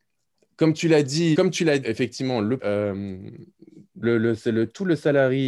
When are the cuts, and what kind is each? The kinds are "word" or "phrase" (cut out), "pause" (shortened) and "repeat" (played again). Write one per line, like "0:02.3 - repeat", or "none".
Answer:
0:01.3 - word
0:01.8 - word
0:02.6 - word
0:04.0 - word